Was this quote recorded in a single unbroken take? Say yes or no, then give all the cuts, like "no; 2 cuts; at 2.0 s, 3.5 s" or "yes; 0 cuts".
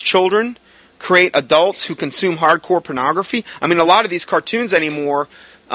yes; 0 cuts